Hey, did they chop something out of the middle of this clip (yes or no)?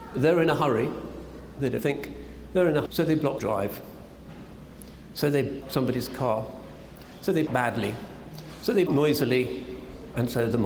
yes